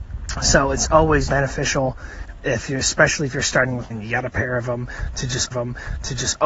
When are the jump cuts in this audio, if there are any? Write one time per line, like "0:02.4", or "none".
0:01.3
0:03.9
0:05.5